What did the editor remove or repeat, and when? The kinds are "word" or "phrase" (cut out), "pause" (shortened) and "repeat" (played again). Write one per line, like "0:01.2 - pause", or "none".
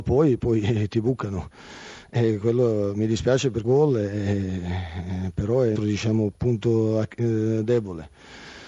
0:03.6 - word
0:05.8 - phrase
0:06.3 - word

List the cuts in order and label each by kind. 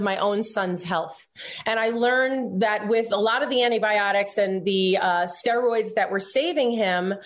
none

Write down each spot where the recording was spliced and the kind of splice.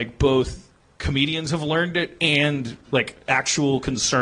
0:02.8 - pause

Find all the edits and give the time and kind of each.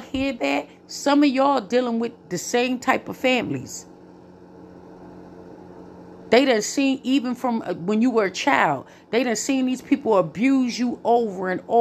none

